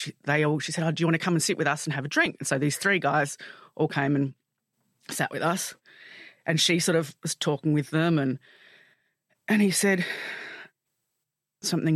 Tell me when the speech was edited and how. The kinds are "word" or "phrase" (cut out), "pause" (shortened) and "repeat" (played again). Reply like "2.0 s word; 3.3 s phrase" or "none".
none